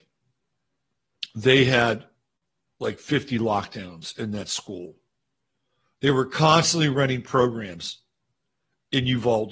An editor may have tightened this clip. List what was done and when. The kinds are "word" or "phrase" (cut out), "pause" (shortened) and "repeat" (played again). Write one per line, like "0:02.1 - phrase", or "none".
none